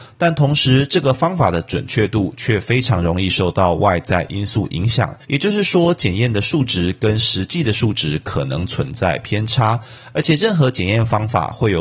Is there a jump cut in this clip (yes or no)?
yes